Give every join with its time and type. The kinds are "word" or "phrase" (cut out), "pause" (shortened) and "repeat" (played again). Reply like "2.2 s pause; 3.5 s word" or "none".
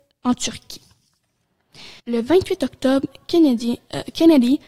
2.0 s pause